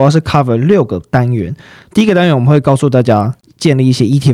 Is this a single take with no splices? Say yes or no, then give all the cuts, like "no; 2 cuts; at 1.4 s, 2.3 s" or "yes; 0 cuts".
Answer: yes; 0 cuts